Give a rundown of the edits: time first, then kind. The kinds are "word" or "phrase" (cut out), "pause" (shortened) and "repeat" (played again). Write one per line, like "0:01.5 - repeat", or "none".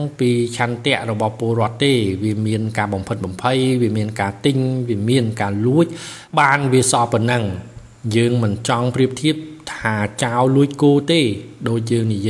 0:06.3 - pause

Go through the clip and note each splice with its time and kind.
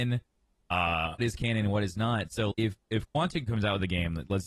0:01.2 - phrase
0:02.5 - word
0:03.5 - word

